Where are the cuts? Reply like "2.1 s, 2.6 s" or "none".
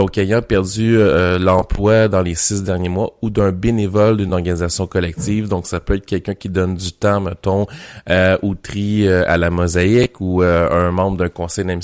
none